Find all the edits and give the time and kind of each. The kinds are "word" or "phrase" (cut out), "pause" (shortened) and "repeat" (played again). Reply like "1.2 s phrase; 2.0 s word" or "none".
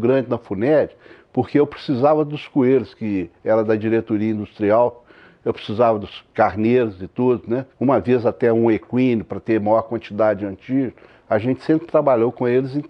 7.7 s pause